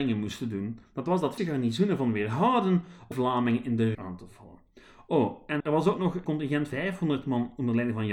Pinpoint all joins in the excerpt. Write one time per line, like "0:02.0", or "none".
0:01.4
0:03.1
0:03.9
0:05.6
0:06.2
0:06.7

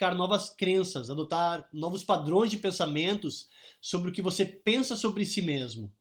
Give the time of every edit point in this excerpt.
none

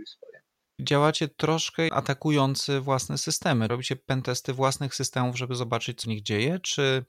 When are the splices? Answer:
0:01.9
0:03.7
0:06.0

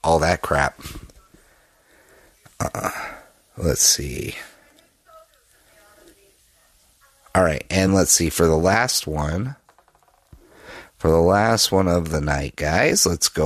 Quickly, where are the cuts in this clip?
0:07.9

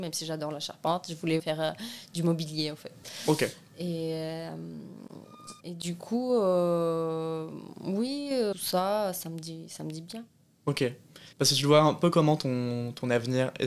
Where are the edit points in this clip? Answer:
0:01.4
0:05.6
0:08.5
0:11.3

